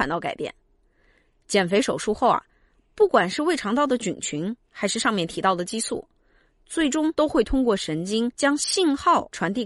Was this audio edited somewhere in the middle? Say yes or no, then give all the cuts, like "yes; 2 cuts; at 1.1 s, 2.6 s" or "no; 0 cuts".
no; 0 cuts